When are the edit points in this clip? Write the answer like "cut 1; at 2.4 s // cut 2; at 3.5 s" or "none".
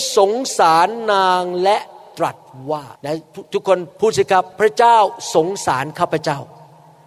cut 1; at 3.0 s // cut 2; at 3.9 s // cut 3; at 4.5 s

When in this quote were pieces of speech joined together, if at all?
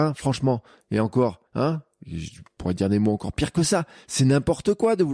cut 1; at 1.5 s

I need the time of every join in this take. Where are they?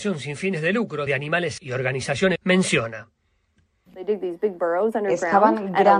cut 1; at 1.1 s // cut 2; at 1.6 s // cut 3; at 2.4 s

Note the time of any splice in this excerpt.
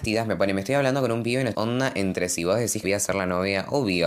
cut 1; at 1.5 s // cut 2; at 2.8 s

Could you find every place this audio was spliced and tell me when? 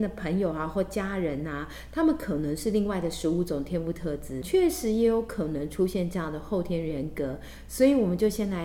cut 1; at 4.4 s

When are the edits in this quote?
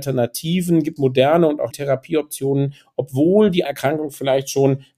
cut 1; at 1.0 s // cut 2; at 1.7 s // cut 3; at 3.6 s

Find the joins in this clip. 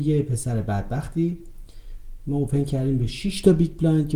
none

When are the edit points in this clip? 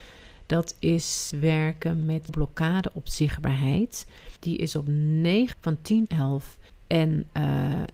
cut 1; at 1.3 s // cut 2; at 2.3 s // cut 3; at 4.4 s // cut 4; at 5.5 s // cut 5; at 6.1 s // cut 6; at 6.7 s

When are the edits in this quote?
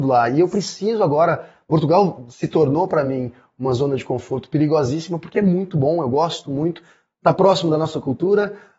none

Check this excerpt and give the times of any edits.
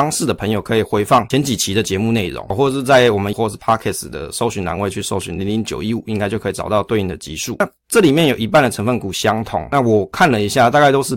cut 1; at 3.3 s

